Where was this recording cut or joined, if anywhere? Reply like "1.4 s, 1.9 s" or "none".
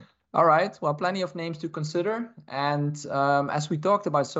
none